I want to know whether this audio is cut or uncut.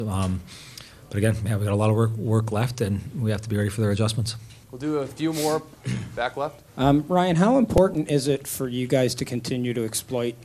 cut